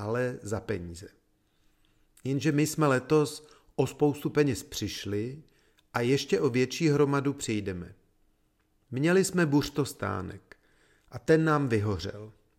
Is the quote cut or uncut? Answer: uncut